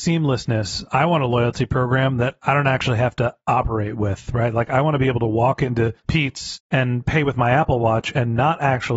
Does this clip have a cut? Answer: yes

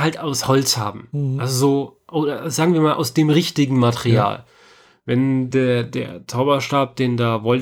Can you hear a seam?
no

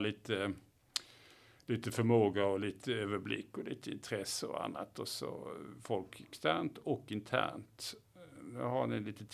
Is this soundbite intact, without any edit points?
yes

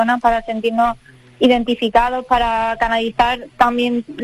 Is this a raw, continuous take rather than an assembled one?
yes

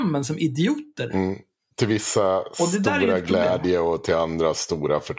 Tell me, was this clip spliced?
no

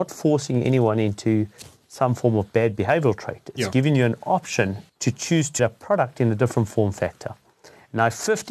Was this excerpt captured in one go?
no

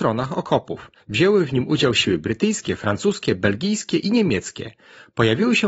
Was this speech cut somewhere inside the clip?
no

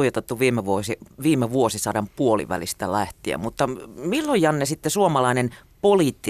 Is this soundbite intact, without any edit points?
yes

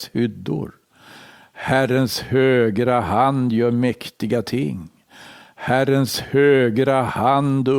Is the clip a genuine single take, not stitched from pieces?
yes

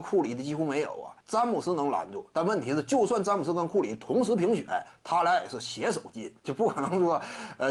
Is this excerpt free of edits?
no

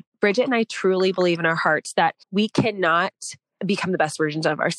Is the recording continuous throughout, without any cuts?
no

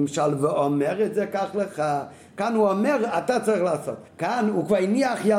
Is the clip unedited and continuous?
no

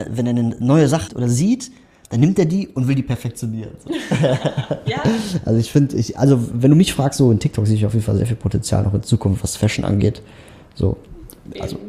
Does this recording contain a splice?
yes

